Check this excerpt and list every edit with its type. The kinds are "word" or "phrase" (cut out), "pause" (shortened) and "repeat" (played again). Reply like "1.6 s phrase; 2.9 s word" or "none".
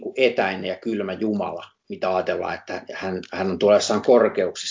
none